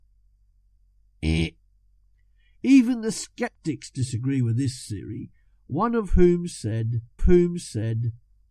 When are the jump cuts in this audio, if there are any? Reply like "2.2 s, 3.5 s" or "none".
7.2 s